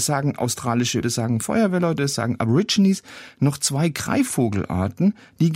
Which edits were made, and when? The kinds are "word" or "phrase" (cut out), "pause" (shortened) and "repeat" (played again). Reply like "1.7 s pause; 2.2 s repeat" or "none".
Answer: 1.0 s word